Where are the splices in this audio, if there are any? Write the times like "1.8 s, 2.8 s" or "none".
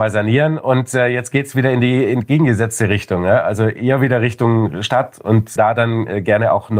5.6 s

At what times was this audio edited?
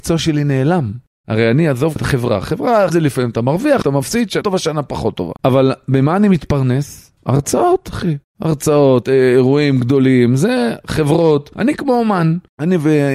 2.0 s, 2.9 s, 3.8 s, 4.4 s, 5.4 s, 9.0 s

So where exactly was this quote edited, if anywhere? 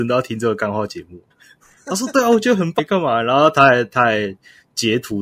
1.3 s, 2.8 s

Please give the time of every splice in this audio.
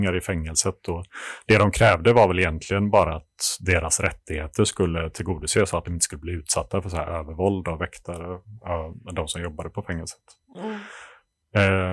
none

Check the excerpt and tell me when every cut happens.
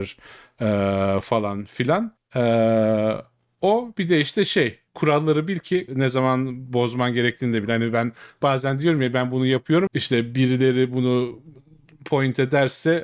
2.2 s, 4.9 s, 5.9 s, 9.9 s

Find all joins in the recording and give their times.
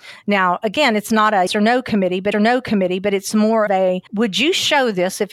1.5 s, 2.3 s, 3.7 s, 4.1 s

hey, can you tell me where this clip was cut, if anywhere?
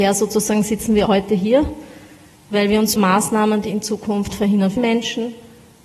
1.1 s, 2.9 s, 4.3 s, 4.8 s

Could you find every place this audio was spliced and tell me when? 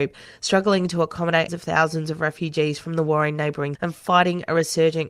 1.5 s, 3.7 s

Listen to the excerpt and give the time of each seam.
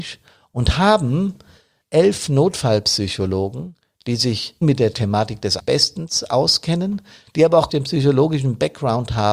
1.8 s, 4.6 s, 5.6 s, 7.7 s

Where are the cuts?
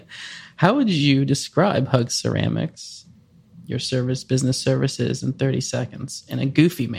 none

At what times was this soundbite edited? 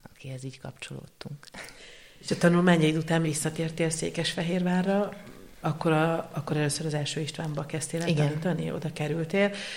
3.2 s, 5.6 s

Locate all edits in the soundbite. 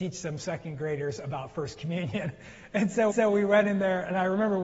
3.1 s

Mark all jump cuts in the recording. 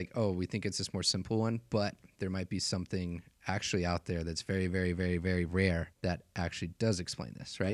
5.9 s

